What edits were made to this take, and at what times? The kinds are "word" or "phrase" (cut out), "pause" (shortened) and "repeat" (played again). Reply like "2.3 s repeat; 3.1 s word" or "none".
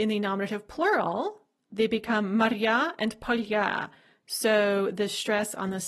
none